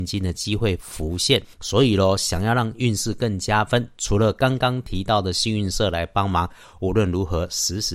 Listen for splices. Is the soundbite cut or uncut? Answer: cut